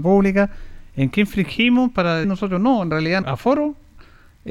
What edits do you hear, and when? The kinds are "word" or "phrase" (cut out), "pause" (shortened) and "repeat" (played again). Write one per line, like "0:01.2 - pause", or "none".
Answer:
0:02.2 - word
0:03.2 - word